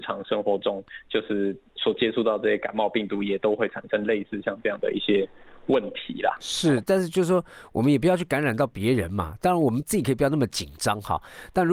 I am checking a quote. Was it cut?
no; 0 cuts

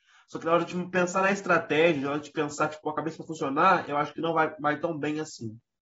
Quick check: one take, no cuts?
yes; 0 cuts

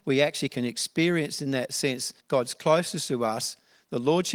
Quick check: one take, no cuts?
no; 1 cut; at 2.2 s

